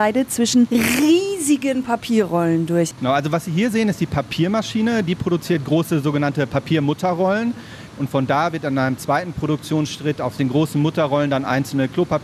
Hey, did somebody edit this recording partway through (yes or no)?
no